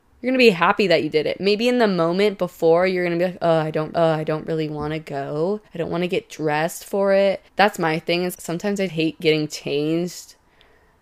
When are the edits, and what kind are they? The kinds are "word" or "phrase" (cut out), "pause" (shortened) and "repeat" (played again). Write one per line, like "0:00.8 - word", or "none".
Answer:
0:03.9 - repeat
0:05.7 - pause
0:07.5 - pause
0:08.3 - word
0:08.9 - word

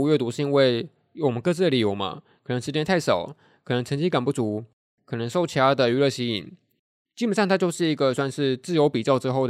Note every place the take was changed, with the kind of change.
none

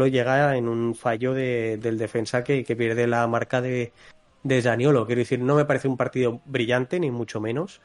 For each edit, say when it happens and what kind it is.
none

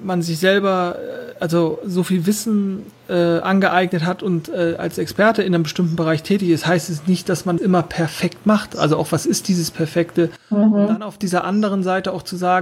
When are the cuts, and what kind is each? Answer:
0:07.6 - phrase

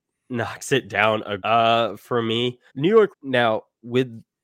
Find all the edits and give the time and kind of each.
0:01.4 - word
0:02.7 - pause
0:03.1 - word

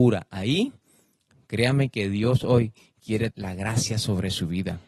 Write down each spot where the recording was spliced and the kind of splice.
0:03.3 - word

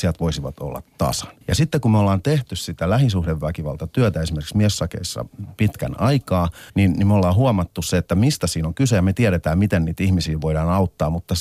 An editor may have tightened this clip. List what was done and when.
0:01.4 - pause
0:06.7 - pause

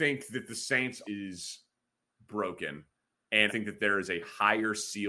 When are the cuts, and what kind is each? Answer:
0:01.0 - word
0:03.5 - word

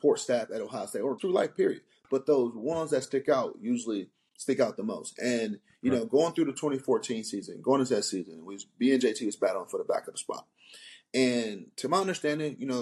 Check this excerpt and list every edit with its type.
0:01.2 - word

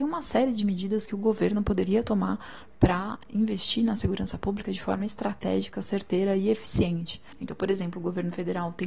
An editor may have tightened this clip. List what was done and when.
0:07.3 - pause

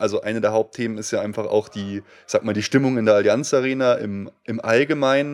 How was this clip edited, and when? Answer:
none

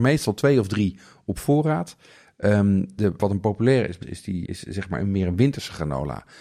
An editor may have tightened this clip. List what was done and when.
0:03.2 - word
0:04.0 - word
0:04.5 - word

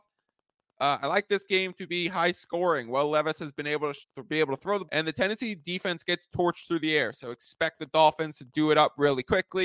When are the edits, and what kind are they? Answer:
0:04.0 - word
0:04.9 - word

